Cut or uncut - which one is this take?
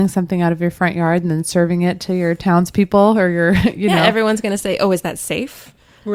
uncut